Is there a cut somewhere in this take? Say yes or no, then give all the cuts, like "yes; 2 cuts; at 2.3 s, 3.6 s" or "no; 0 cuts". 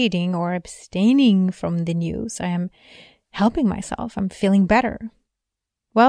no; 0 cuts